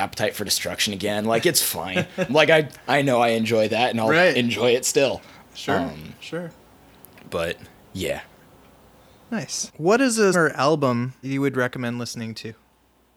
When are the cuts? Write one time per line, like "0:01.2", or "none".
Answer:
0:02.3
0:10.3
0:11.2